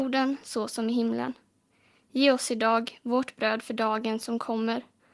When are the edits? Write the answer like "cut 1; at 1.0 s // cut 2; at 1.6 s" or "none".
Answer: none

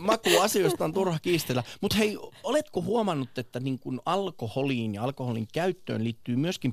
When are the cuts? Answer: none

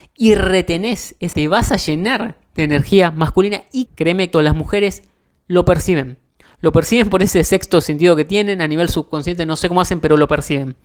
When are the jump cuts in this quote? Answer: cut 1; at 1.3 s // cut 2; at 3.9 s // cut 3; at 4.3 s

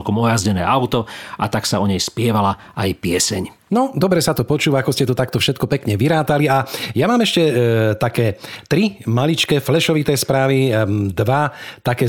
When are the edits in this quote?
cut 1; at 3.6 s

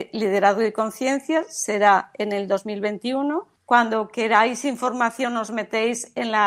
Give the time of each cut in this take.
cut 1; at 3.6 s

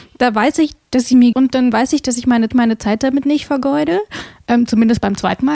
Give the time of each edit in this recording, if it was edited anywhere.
cut 1; at 1.3 s // cut 2; at 2.5 s

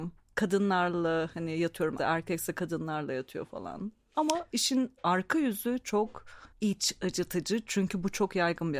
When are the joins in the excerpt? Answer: cut 1; at 2.0 s // cut 2; at 6.5 s

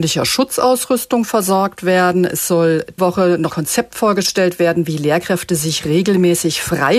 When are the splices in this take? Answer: cut 1; at 3.0 s // cut 2; at 3.5 s

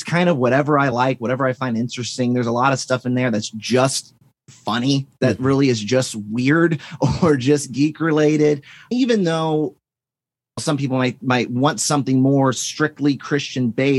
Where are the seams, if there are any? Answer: none

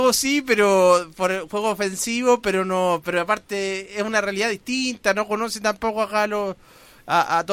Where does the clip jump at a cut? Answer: none

